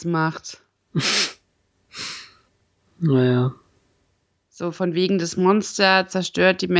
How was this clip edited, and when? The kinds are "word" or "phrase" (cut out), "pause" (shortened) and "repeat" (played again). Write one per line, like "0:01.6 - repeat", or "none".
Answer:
none